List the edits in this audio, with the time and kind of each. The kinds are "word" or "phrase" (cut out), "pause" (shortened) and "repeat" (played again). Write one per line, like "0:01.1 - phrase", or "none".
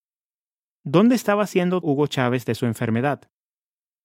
0:01.8 - word